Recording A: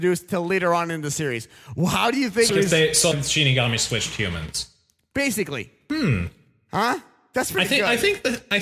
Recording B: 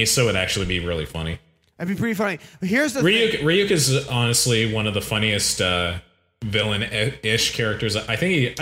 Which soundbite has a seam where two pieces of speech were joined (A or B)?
A